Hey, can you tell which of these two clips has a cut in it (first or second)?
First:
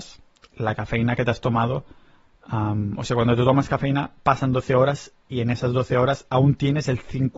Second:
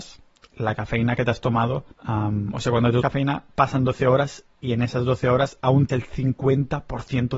second